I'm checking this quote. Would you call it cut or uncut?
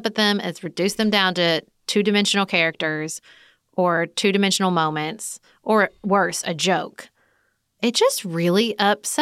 uncut